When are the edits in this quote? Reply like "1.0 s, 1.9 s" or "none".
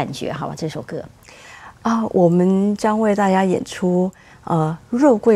none